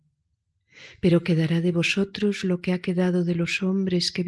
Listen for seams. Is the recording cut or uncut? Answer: uncut